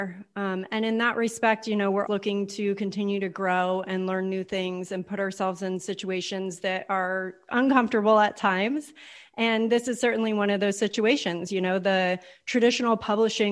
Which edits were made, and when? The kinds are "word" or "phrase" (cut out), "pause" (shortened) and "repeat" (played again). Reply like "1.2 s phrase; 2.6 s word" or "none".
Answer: 2.1 s word